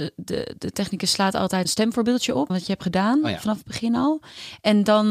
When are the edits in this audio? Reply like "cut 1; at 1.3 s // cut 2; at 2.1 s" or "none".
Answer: cut 1; at 1.6 s // cut 2; at 2.5 s